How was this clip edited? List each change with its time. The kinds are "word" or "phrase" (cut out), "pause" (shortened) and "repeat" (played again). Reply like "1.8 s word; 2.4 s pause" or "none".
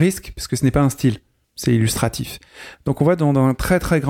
none